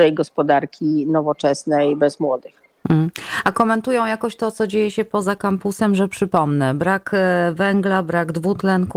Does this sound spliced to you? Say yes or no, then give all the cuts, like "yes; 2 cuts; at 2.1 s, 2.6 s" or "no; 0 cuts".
no; 0 cuts